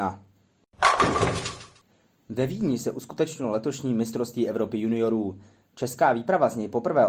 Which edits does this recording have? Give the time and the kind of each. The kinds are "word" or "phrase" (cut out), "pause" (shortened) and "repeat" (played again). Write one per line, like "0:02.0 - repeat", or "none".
none

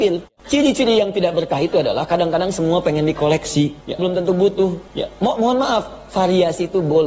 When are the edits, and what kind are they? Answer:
0:04.0 - word

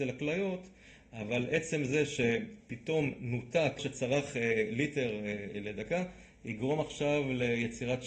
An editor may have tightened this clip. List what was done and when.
0:03.8 - word

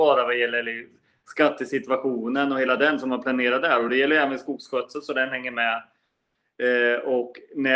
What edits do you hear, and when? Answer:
none

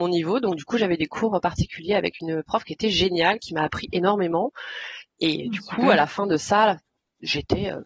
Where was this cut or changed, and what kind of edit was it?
none

